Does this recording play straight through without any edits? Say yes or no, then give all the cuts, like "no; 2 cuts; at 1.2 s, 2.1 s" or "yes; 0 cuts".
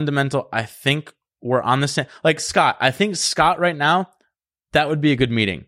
yes; 0 cuts